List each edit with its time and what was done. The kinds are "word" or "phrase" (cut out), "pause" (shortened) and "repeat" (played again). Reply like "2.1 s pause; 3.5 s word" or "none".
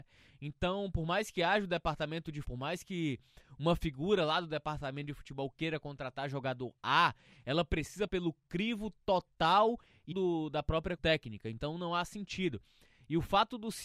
2.4 s word; 8.1 s word; 10.1 s word; 11.0 s word